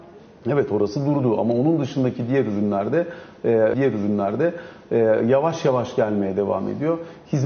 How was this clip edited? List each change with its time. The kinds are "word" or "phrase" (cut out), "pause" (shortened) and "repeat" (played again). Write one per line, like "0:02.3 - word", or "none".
0:03.7 - repeat